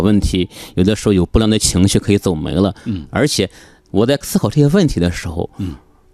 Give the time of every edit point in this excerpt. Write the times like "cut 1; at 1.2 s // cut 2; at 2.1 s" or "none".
none